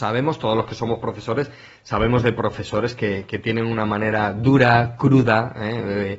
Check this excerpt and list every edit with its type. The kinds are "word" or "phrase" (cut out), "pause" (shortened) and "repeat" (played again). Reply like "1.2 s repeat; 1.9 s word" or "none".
none

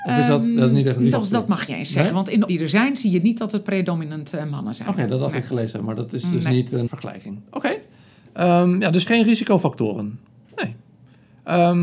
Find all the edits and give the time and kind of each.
1.1 s word; 1.7 s word; 2.5 s word; 6.9 s word; 9.1 s word

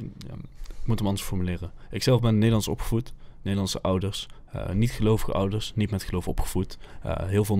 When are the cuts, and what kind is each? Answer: none

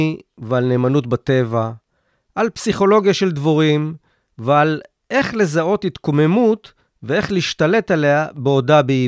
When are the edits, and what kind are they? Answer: none

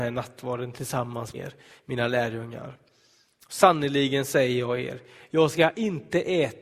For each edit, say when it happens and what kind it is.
1.3 s word

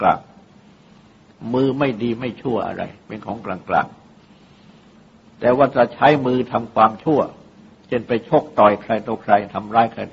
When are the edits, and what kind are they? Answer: 7.7 s pause

